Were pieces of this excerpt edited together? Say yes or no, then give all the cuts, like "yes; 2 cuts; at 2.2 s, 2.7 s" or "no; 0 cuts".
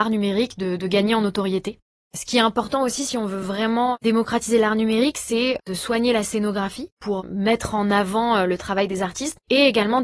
no; 0 cuts